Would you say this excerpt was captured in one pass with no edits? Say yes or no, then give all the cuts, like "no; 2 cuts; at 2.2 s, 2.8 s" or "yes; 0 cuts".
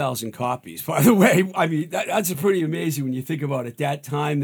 yes; 0 cuts